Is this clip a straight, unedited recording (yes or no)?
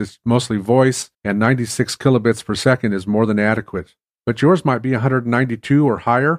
no